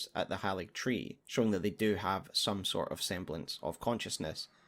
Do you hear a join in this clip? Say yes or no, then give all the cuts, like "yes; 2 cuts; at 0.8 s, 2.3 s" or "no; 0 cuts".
yes; 1 cut; at 1.2 s